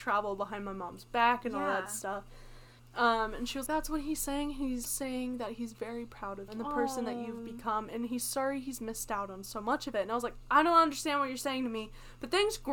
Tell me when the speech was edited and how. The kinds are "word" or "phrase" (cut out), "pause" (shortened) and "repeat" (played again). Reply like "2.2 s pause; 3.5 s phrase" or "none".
2.8 s pause; 3.7 s word; 4.8 s word; 6.5 s word